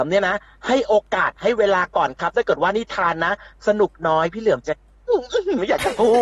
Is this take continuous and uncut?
yes; 0 cuts

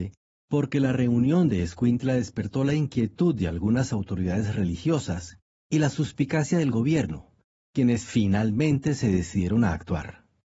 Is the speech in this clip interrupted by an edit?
no; 0 cuts

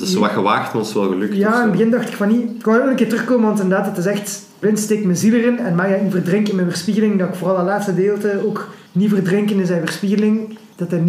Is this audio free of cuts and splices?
no; 1 cut; at 8.9 s

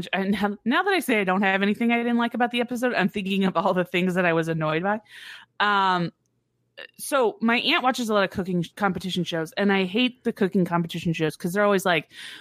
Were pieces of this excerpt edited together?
yes; 1 cut; at 8.7 s

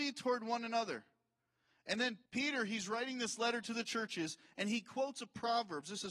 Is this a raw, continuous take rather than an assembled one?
no; 1 cut; at 2.3 s

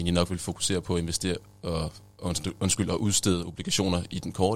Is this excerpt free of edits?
yes; 0 cuts

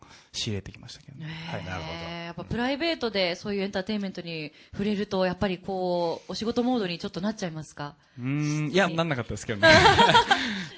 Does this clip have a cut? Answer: yes; 1 cut; at 8.9 s

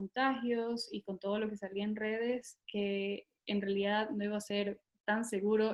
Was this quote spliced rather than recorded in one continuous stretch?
no; 0 cuts

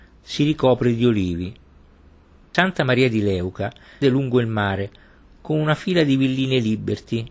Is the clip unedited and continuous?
no; 1 cut; at 4.0 s

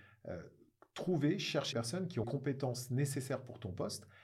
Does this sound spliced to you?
yes; 2 cuts; at 1.7 s, 2.2 s

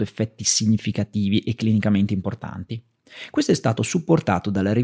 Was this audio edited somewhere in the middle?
no; 0 cuts

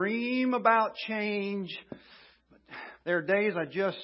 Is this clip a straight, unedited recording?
no; 1 cut; at 3.0 s

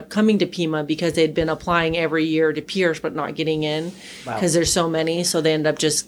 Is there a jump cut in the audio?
no; 0 cuts

